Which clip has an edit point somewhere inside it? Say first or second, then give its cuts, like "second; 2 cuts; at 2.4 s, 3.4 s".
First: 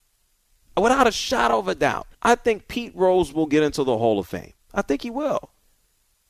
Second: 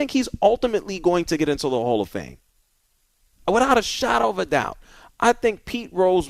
first; 1 cut; at 2.1 s